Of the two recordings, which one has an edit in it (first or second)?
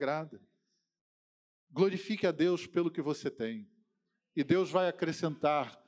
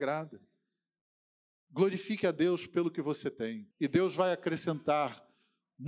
second